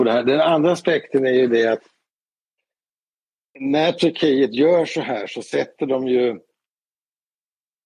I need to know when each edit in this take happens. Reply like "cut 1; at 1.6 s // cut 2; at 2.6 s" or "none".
none